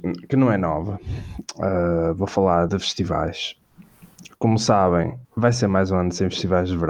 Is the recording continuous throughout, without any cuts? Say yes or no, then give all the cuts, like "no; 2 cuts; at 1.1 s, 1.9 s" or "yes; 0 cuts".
no; 2 cuts; at 2.7 s, 5.2 s